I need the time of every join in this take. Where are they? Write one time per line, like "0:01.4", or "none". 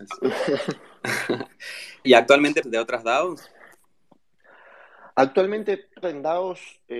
0:02.0
0:02.6
0:06.0